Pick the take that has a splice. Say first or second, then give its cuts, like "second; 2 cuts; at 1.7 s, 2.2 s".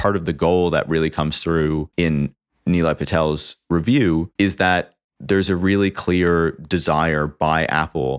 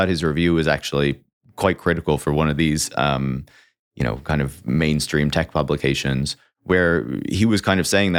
first; 2 cuts; at 1.9 s, 4.4 s